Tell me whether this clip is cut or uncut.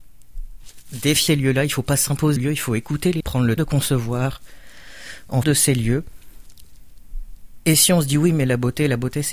cut